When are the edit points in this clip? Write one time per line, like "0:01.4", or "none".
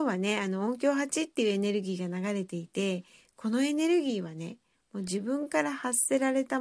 none